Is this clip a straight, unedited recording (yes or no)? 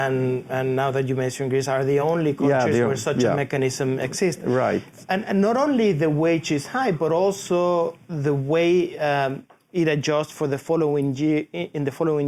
yes